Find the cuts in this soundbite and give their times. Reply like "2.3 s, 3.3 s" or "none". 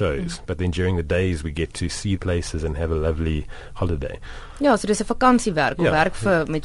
2.2 s